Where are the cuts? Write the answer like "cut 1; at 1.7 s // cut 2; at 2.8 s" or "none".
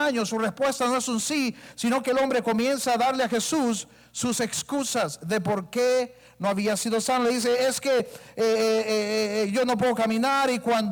none